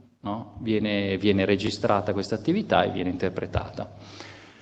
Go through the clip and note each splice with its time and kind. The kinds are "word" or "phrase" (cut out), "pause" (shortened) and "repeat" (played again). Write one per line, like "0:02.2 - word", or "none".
none